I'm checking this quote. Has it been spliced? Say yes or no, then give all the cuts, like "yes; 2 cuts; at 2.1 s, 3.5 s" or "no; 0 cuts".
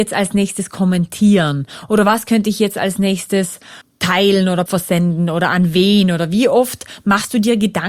yes; 2 cuts; at 3.8 s, 4.7 s